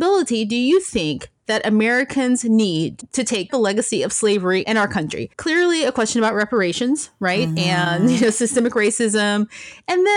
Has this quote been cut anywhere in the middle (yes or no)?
yes